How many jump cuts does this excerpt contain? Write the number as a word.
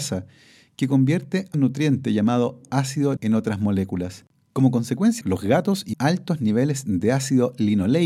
four